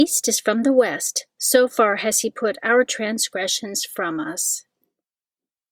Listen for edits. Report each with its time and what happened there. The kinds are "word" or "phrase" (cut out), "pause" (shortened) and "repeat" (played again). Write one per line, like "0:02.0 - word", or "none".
none